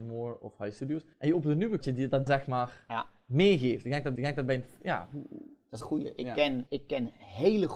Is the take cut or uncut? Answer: cut